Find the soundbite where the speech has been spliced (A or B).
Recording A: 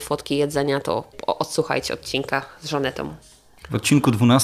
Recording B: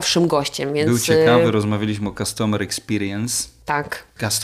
A